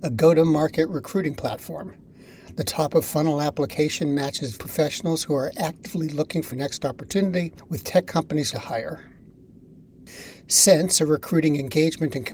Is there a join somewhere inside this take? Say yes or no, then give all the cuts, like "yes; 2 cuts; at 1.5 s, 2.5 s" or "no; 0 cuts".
yes; 3 cuts; at 4.6 s, 6.5 s, 8.5 s